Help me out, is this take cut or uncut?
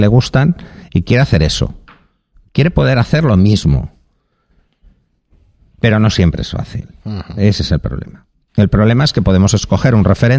uncut